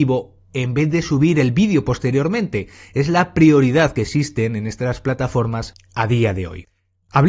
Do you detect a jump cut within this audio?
no; 0 cuts

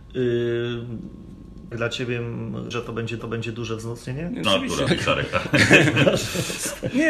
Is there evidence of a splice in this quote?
yes; 5 cuts; at 1.7 s, 2.7 s, 3.2 s, 4.4 s, 4.9 s

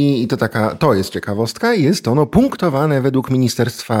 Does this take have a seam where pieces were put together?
no; 0 cuts

